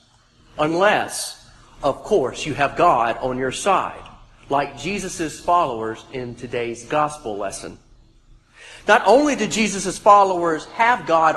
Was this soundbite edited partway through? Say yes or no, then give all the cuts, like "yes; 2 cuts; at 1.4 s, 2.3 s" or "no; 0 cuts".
no; 0 cuts